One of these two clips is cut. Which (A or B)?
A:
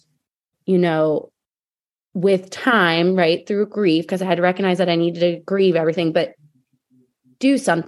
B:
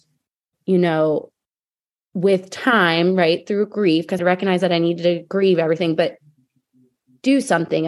B